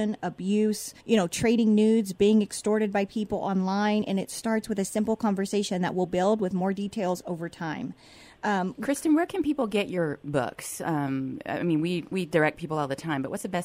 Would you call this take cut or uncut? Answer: cut